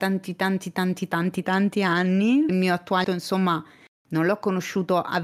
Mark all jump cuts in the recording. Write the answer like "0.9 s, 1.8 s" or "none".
1.4 s, 2.5 s, 3.0 s